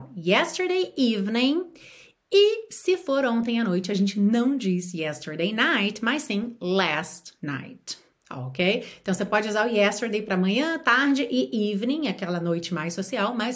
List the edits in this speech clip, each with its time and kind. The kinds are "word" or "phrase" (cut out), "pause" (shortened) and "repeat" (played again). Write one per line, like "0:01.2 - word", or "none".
none